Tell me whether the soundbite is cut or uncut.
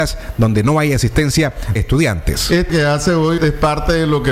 cut